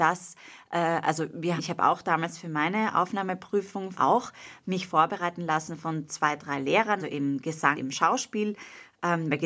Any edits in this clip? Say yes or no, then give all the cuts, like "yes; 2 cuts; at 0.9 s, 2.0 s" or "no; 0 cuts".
yes; 4 cuts; at 1.6 s, 3.9 s, 7.0 s, 7.7 s